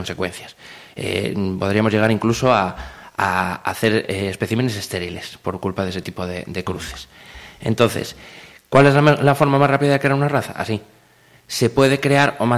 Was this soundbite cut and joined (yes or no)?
no